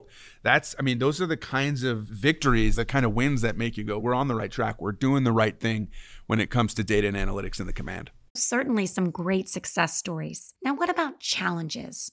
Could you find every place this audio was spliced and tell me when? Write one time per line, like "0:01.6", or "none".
0:08.4
0:10.6